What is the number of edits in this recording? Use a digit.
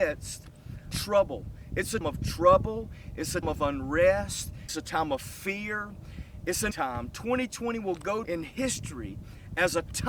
6